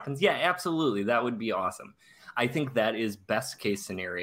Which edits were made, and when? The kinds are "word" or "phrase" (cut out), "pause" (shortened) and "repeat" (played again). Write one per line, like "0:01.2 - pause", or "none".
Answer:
none